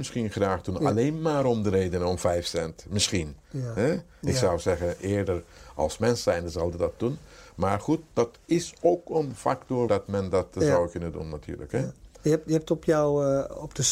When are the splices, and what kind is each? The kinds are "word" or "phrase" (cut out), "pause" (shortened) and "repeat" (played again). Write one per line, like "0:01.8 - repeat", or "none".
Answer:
0:09.9 - word